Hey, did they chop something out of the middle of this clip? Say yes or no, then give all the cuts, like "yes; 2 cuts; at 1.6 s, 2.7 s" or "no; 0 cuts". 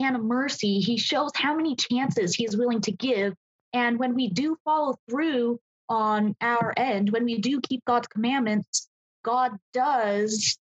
no; 0 cuts